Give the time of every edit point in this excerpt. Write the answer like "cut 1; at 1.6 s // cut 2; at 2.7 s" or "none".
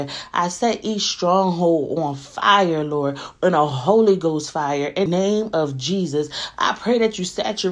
cut 1; at 5.1 s